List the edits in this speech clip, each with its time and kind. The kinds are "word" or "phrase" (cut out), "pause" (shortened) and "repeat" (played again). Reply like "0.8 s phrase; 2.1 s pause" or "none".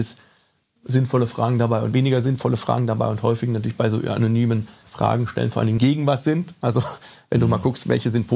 4.8 s word; 5.8 s phrase